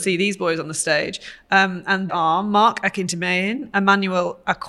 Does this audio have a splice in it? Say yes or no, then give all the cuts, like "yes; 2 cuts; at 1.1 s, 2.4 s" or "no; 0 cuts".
yes; 1 cut; at 2.1 s